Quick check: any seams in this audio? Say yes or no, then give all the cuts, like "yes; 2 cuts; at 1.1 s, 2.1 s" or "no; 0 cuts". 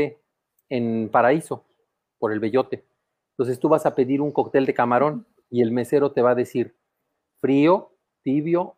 no; 0 cuts